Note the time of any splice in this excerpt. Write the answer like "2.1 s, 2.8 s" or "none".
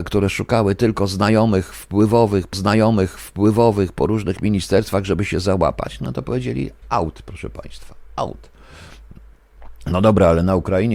2.5 s, 6.8 s